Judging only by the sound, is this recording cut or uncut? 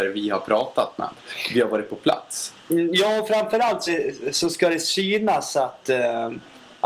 cut